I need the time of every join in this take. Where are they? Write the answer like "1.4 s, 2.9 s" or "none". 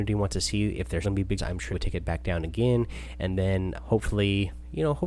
1.0 s, 1.4 s, 1.7 s, 3.8 s